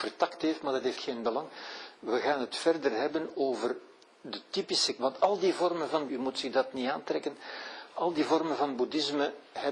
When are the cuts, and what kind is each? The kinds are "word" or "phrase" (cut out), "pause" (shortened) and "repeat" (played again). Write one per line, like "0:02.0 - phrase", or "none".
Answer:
0:01.0 - phrase
0:04.1 - pause
0:05.0 - word
0:06.1 - word